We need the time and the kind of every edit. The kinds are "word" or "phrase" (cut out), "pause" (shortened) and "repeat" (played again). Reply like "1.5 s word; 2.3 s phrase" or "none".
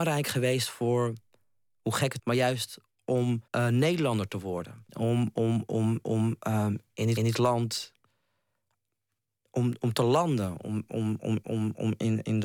2.2 s phrase; 3.5 s pause; 4.9 s pause; 6.0 s repeat; 7.2 s repeat; 11.4 s repeat